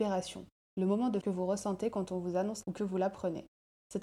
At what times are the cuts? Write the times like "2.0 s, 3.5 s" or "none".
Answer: 1.2 s, 2.6 s